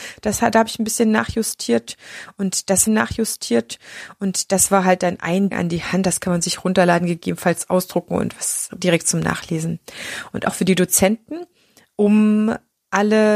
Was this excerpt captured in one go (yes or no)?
no